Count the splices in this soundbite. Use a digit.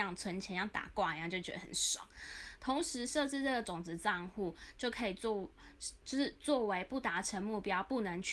1